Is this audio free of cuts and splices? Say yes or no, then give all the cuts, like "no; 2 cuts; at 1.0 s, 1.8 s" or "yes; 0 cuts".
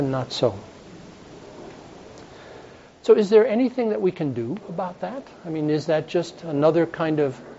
yes; 0 cuts